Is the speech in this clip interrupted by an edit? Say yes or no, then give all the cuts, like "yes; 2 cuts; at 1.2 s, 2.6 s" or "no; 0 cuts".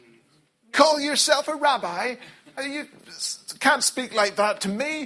yes; 1 cut; at 2.6 s